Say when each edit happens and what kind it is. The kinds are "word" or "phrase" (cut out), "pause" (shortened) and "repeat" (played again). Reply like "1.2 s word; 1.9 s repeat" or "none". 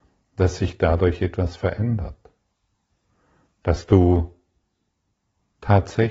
none